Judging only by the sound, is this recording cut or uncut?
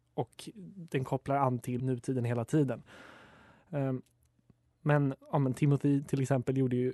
cut